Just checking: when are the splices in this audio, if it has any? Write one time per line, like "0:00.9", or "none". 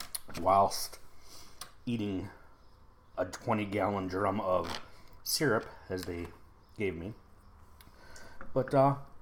0:03.1